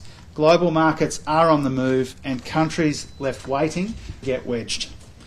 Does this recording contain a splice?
yes; 1 cut; at 4.2 s

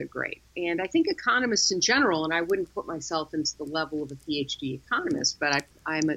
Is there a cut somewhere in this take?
no; 0 cuts

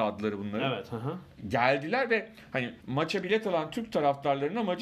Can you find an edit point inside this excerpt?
yes; 1 cut; at 2.8 s

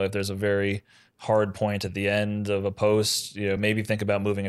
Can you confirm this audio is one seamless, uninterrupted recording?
yes; 0 cuts

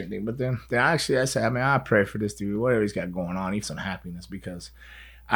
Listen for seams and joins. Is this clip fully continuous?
no; 1 cut; at 3.6 s

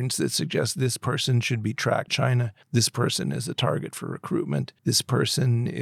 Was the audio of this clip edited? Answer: yes; 3 cuts; at 2.1 s, 2.6 s, 4.8 s

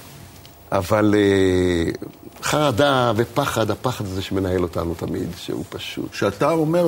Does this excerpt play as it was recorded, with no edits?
yes; 0 cuts

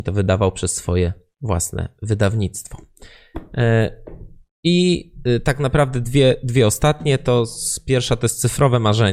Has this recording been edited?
no; 0 cuts

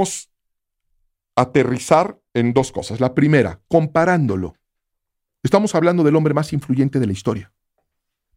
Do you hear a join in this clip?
yes; 1 cut; at 2.3 s

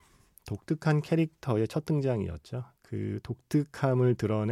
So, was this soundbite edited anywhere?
yes; 1 cut; at 2.8 s

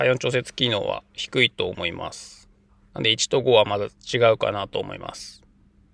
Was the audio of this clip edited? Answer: no; 0 cuts

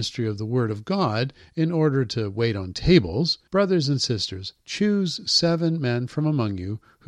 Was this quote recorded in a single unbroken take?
no; 1 cut; at 3.5 s

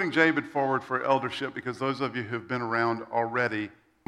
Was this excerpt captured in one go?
yes; 0 cuts

